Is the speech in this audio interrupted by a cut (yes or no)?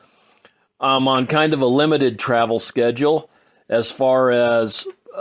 no